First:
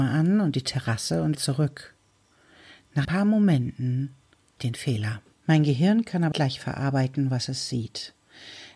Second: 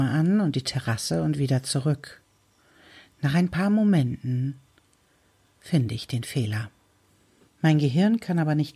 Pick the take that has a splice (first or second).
first